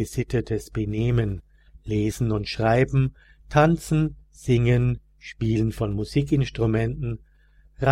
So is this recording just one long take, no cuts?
yes; 0 cuts

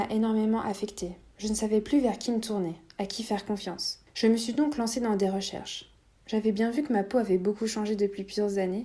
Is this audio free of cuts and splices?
yes; 0 cuts

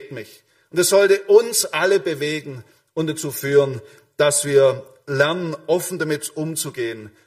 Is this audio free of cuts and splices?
yes; 0 cuts

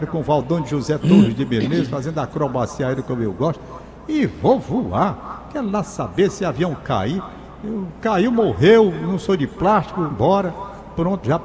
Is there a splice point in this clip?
yes; 1 cut; at 10.1 s

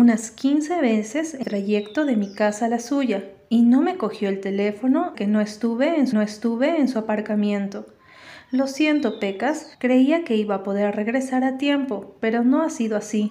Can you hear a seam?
yes; 4 cuts; at 1.4 s, 5.1 s, 6.1 s, 9.7 s

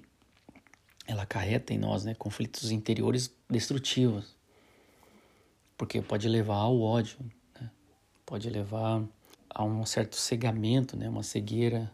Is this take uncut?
no; 3 cuts; at 3.4 s, 7.9 s, 9.3 s

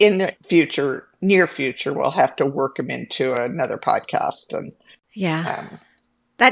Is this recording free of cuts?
yes; 0 cuts

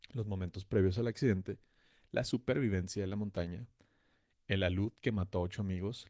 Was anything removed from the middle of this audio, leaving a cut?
no; 0 cuts

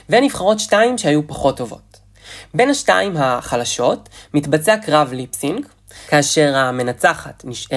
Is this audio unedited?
yes; 0 cuts

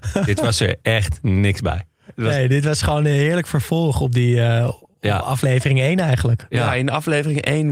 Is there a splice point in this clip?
no; 0 cuts

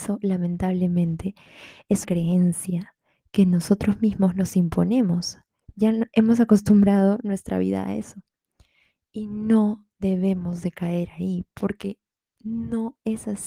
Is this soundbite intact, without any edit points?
no; 2 cuts; at 2.0 s, 5.7 s

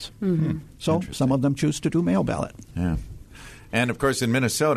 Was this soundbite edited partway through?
no; 0 cuts

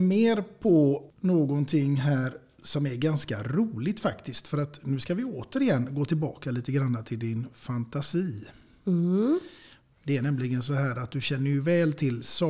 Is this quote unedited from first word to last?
yes; 0 cuts

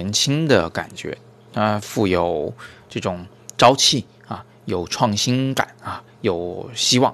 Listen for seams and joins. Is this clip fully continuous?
yes; 0 cuts

